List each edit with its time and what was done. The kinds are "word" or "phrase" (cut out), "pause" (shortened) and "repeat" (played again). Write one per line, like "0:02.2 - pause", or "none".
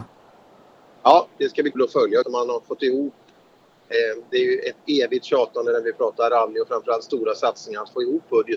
0:01.7 - word
0:02.2 - phrase